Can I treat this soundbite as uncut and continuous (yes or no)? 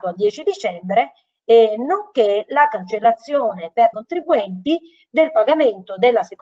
no